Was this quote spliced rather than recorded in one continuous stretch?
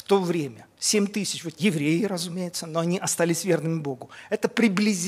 yes; 1 cut; at 1.6 s

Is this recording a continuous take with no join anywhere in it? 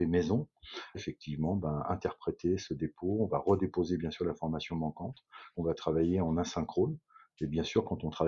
no; 2 cuts; at 0.9 s, 5.5 s

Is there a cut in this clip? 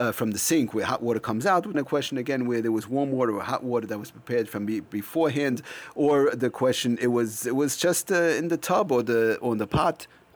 yes; 1 cut; at 1.7 s

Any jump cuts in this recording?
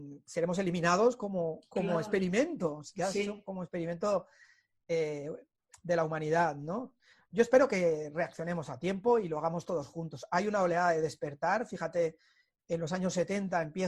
no; 0 cuts

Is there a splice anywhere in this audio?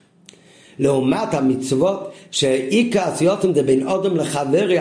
no; 0 cuts

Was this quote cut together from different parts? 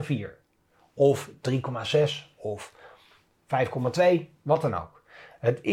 no; 0 cuts

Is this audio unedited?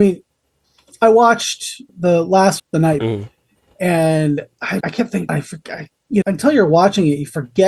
no; 6 cuts; at 1.9 s, 2.6 s, 3.0 s, 4.8 s, 5.3 s, 6.2 s

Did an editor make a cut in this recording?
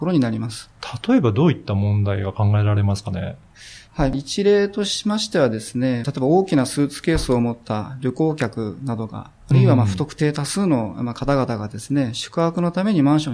yes; 1 cut; at 3.9 s

